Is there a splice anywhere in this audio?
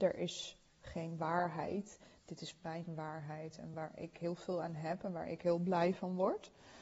no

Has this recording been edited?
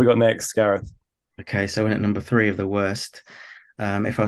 no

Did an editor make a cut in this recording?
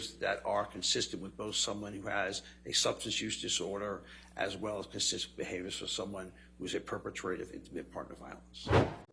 no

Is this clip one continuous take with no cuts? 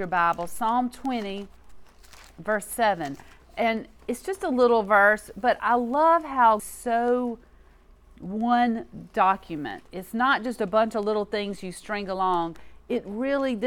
no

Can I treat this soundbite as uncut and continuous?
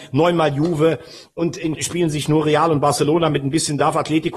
no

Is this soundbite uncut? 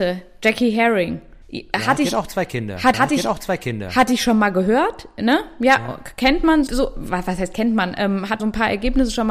no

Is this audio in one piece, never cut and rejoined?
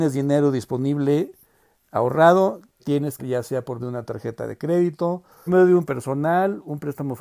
no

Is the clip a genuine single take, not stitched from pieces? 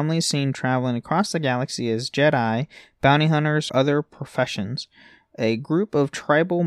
no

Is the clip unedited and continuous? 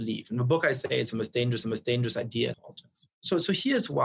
no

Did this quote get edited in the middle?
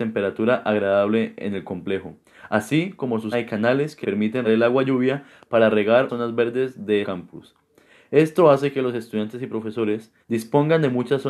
yes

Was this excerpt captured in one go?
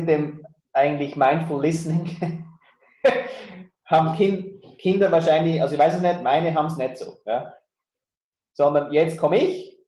yes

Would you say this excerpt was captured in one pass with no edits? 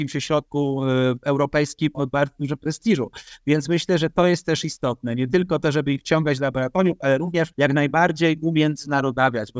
no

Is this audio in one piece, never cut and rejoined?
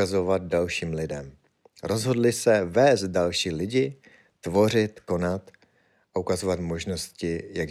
yes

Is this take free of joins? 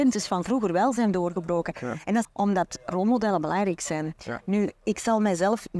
no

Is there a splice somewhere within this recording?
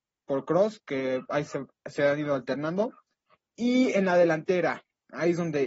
no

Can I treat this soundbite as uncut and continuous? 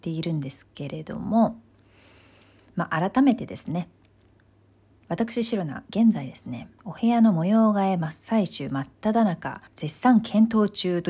no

